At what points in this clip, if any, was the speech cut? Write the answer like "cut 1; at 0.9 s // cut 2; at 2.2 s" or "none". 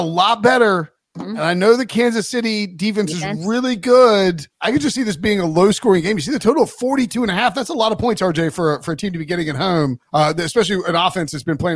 cut 1; at 4.5 s // cut 2; at 10.0 s